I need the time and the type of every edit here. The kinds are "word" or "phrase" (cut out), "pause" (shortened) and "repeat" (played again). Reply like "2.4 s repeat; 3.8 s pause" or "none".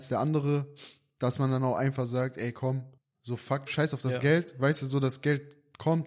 3.0 s pause; 3.7 s word